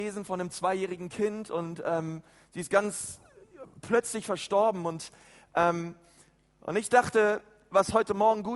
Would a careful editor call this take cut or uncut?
uncut